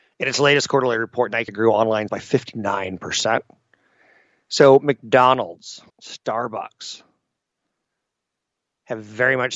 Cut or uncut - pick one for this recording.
cut